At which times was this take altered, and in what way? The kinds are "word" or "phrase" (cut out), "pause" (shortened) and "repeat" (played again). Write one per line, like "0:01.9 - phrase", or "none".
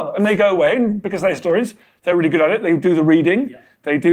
none